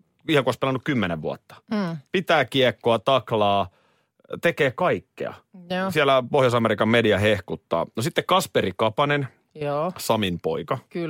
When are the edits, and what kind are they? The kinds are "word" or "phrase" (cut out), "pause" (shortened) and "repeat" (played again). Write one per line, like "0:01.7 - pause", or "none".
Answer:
none